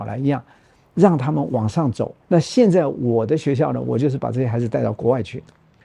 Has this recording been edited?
yes; 1 cut; at 2.2 s

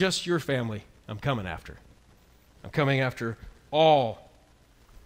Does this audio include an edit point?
no; 0 cuts

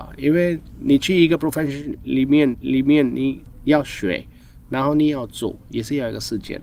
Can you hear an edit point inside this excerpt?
yes; 1 cut; at 2.5 s

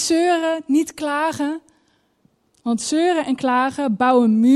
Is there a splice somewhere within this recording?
no; 0 cuts

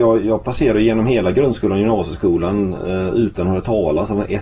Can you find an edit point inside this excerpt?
no; 0 cuts

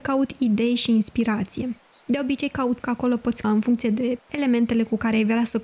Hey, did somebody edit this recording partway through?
yes; 2 cuts; at 2.8 s, 3.4 s

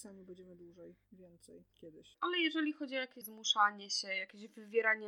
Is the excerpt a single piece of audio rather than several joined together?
no; 2 cuts; at 1.7 s, 3.2 s

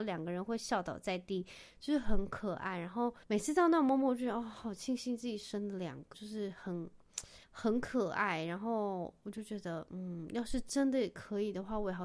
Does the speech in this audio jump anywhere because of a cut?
yes; 3 cuts; at 3.2 s, 6.1 s, 7.4 s

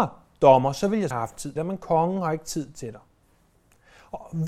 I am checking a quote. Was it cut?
yes; 2 cuts; at 1.1 s, 1.6 s

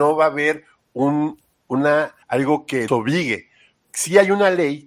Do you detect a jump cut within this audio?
yes; 3 cuts; at 2.2 s, 2.9 s, 3.8 s

